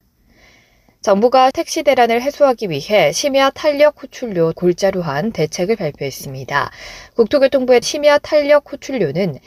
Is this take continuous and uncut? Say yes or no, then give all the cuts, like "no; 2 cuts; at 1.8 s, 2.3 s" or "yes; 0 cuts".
no; 3 cuts; at 1.5 s, 4.5 s, 7.8 s